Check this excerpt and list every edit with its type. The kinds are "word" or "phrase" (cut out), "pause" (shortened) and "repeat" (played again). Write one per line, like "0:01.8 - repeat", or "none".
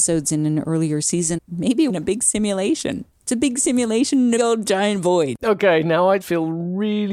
0:01.4 - word
0:01.9 - phrase
0:04.4 - phrase
0:06.2 - word